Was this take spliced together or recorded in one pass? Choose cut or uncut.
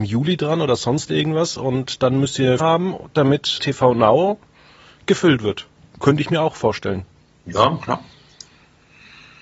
cut